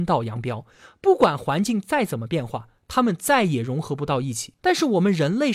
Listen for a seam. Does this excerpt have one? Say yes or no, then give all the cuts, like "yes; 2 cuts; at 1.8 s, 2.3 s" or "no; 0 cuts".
yes; 1 cut; at 4.6 s